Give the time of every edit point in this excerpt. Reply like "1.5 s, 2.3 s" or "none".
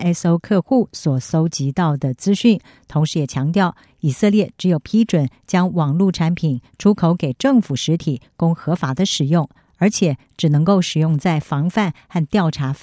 none